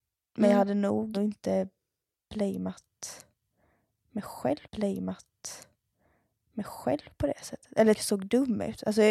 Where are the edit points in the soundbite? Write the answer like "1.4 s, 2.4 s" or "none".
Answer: 1.1 s, 4.6 s, 7.9 s